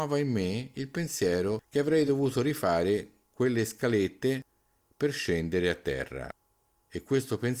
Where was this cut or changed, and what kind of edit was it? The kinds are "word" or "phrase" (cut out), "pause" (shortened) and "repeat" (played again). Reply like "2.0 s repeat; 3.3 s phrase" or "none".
none